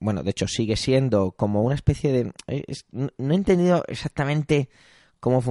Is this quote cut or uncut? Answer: uncut